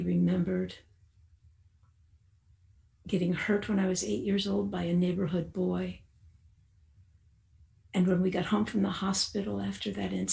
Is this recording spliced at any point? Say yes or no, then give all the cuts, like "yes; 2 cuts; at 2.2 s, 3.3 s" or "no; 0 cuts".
no; 0 cuts